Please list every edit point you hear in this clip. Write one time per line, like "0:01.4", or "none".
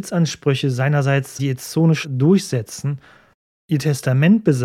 0:01.4
0:02.0